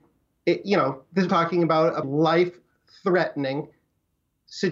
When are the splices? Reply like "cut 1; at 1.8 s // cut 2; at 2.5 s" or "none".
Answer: cut 1; at 1.3 s // cut 2; at 2.0 s